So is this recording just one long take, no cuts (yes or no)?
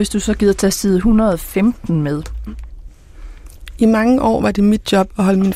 yes